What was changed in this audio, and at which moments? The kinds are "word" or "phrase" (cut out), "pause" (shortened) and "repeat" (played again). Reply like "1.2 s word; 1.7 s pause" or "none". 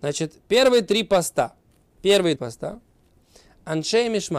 2.4 s word

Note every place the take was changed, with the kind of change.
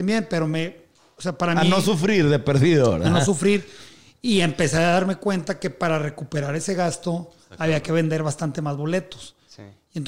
none

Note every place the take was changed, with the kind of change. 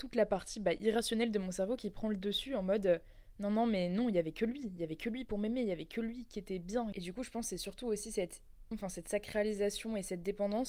8.7 s word

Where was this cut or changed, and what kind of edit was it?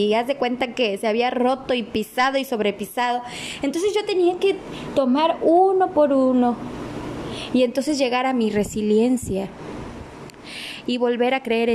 none

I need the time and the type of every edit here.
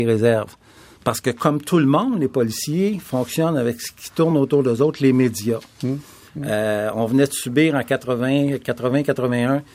none

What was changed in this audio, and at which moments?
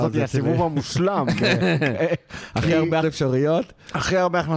3.0 s word

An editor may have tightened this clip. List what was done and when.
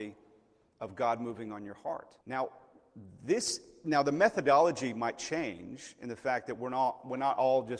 2.2 s pause

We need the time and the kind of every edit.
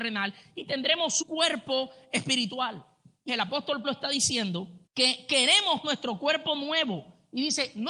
1.2 s word; 3.3 s word; 3.8 s word; 4.9 s pause; 5.8 s word

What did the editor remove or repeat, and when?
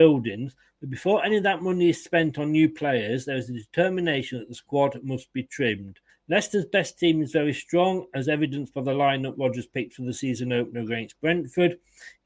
6.1 s pause

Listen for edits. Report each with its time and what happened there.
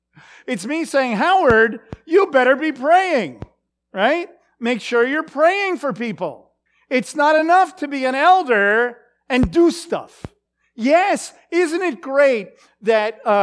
none

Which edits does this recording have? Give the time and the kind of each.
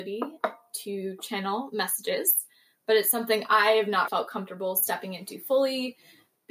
4.1 s word

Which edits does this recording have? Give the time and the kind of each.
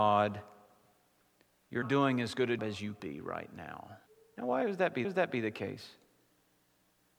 1.8 s word; 2.6 s word; 3.0 s word; 4.1 s pause; 5.0 s repeat

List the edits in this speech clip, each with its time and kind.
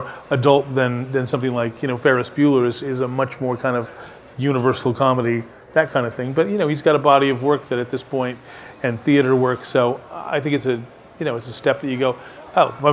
none

